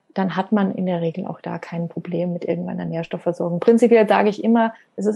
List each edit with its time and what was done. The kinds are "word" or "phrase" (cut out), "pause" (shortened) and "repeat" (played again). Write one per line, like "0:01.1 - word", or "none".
none